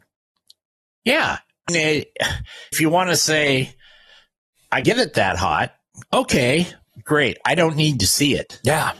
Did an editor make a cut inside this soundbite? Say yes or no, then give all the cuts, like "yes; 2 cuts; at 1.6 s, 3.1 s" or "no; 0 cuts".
yes; 3 cuts; at 1.7 s, 2.7 s, 4.8 s